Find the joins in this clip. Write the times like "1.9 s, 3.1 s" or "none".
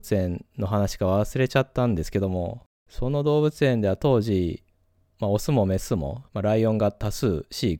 2.8 s, 6.3 s